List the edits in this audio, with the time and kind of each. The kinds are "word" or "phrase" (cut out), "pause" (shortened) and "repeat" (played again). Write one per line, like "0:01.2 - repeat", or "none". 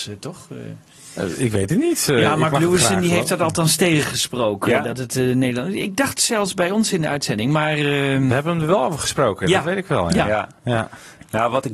none